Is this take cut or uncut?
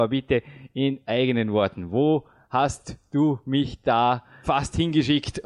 uncut